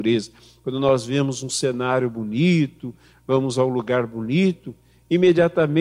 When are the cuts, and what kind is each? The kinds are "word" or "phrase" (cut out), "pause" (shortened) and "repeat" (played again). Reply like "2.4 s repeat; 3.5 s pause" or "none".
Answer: none